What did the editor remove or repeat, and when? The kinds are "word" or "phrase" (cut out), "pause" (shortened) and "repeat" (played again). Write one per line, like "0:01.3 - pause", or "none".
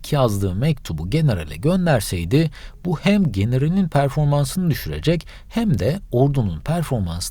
none